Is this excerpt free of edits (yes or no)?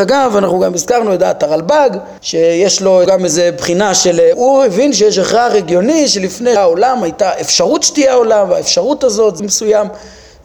no